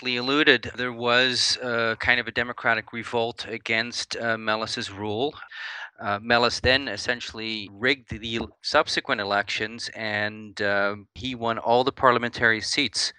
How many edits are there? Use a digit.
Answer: 1